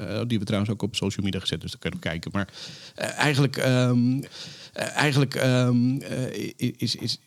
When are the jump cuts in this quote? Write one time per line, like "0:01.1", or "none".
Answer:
0:00.9
0:04.2